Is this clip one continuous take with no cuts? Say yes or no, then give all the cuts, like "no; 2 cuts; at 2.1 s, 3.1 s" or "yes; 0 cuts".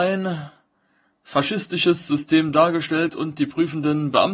yes; 0 cuts